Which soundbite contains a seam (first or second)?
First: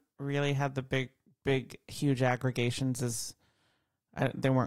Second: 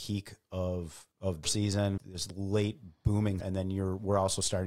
second